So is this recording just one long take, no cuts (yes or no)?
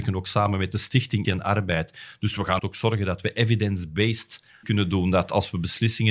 no